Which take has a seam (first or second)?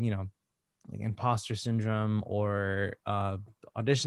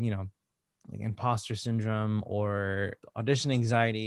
second